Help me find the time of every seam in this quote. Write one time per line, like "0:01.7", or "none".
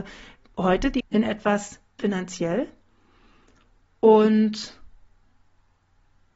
0:01.0
0:02.0